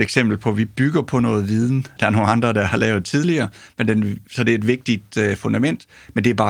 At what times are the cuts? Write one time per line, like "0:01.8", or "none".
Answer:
none